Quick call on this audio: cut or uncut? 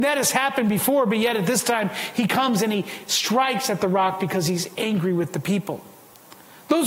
uncut